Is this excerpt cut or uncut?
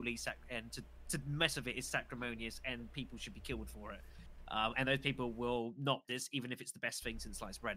cut